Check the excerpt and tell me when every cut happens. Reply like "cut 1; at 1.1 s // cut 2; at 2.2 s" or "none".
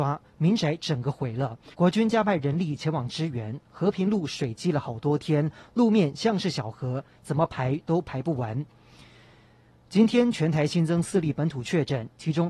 cut 1; at 1.7 s